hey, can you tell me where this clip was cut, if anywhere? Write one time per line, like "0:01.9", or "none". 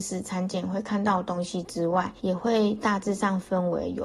0:02.2